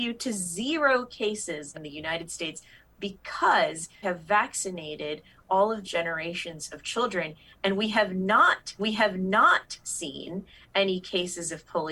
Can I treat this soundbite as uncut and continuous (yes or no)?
no